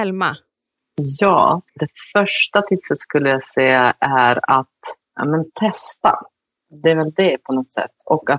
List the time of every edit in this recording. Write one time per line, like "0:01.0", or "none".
0:01.7
0:05.0